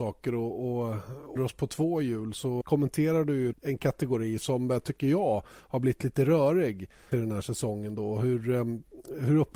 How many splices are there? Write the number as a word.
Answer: four